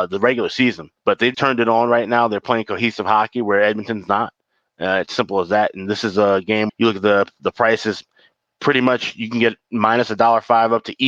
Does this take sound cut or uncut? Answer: cut